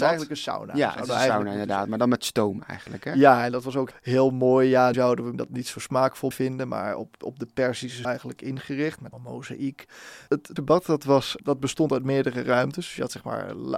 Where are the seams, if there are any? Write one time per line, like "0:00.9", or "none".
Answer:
0:03.9
0:04.9
0:05.3
0:06.3
0:07.2
0:08.0
0:09.1
0:10.6
0:11.4